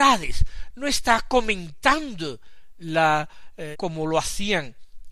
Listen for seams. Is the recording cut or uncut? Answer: cut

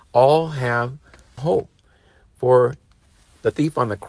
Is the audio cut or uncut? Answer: cut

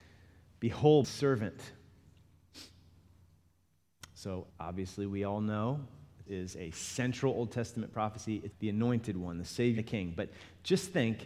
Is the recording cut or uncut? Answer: cut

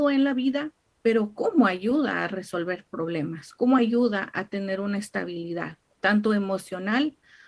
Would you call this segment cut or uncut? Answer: uncut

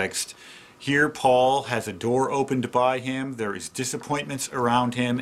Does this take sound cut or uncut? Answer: uncut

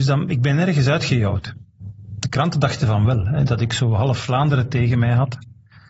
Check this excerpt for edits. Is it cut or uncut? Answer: uncut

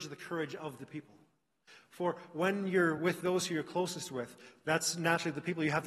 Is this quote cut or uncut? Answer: uncut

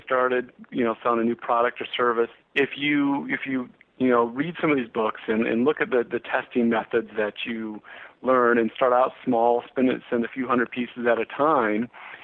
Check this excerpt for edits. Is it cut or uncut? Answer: uncut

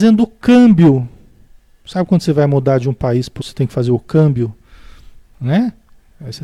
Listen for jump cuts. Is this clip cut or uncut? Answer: cut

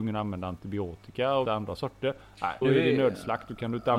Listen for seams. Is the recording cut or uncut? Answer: cut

